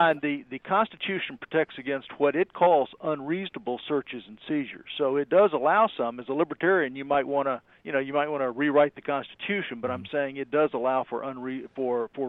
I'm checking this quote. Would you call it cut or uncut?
cut